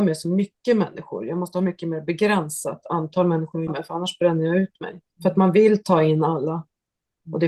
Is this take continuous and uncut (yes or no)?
no